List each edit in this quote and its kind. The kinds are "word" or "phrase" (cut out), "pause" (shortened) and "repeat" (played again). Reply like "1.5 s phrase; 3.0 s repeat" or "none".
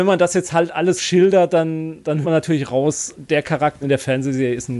1.0 s word; 2.2 s word; 3.1 s word; 3.8 s word